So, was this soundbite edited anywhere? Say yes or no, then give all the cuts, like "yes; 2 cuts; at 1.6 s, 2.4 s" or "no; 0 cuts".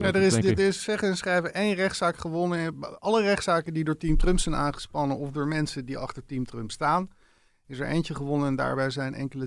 no; 0 cuts